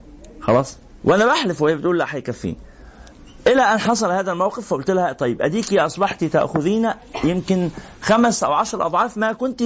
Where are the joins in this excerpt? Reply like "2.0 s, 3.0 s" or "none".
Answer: 1.0 s